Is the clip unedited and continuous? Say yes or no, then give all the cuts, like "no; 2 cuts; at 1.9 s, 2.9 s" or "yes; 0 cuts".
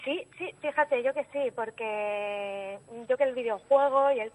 no; 2 cuts; at 1.1 s, 3.2 s